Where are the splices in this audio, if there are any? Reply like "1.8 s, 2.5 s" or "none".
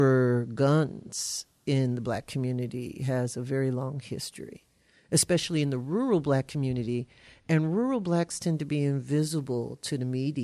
none